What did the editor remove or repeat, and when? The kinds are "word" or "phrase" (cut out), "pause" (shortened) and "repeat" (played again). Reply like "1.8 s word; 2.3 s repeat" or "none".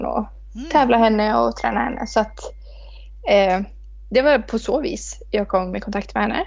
none

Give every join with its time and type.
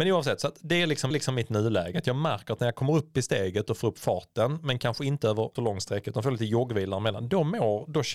1.1 s repeat; 5.6 s word

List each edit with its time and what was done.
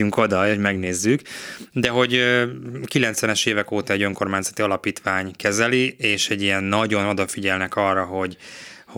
none

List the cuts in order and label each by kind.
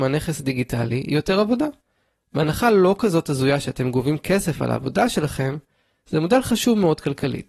none

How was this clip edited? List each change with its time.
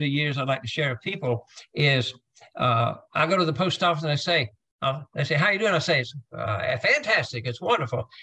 none

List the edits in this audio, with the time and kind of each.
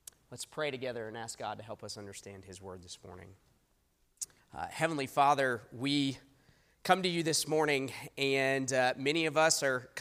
4.4 s pause

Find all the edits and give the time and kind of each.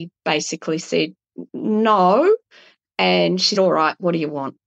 3.6 s word

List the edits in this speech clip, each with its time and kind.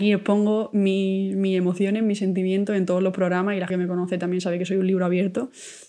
3.7 s word

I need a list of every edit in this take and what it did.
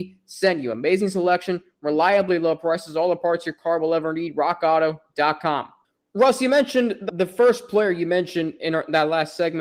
5.8 s pause; 7.1 s word

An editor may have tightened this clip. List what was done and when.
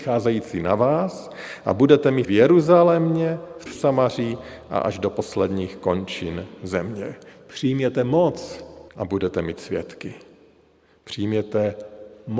2.2 s word; 3.7 s phrase; 8.9 s pause

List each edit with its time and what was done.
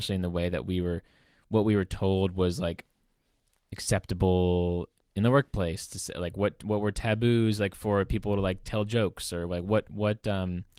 none

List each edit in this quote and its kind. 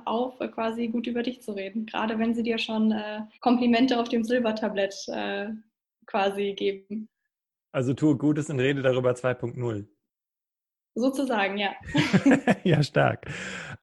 3.3 s pause

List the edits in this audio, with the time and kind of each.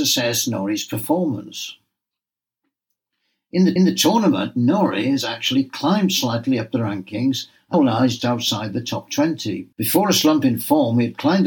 3.8 s repeat; 7.7 s word; 8.2 s word; 9.7 s pause

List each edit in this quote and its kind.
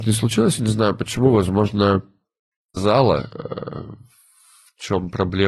2.8 s word

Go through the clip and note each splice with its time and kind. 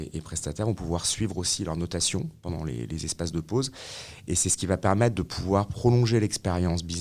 none

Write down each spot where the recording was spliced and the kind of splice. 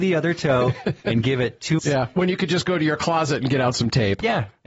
1.8 s word

